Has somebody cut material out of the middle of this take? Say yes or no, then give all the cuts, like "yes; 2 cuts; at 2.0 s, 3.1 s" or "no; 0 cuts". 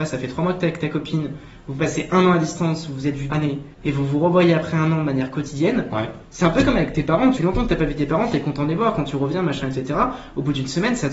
yes; 3 cuts; at 3.3 s, 3.7 s, 7.4 s